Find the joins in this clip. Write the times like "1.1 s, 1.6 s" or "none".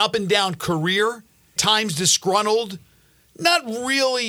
1.6 s